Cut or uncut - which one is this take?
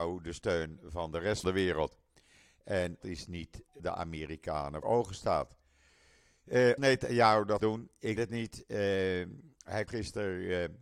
cut